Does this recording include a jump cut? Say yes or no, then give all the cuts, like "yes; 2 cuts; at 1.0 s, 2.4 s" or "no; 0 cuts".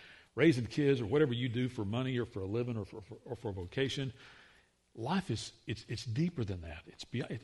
no; 0 cuts